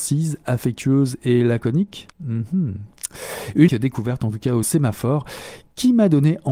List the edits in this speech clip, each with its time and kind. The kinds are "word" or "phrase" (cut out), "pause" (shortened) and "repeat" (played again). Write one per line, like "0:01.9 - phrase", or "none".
0:02.1 - pause
0:03.7 - word
0:04.6 - word